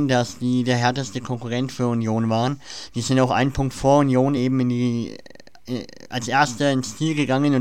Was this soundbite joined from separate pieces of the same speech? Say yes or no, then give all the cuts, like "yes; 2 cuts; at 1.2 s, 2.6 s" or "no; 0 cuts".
no; 0 cuts